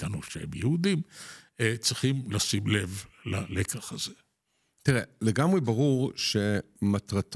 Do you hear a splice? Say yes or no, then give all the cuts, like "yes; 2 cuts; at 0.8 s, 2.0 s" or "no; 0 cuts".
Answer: no; 0 cuts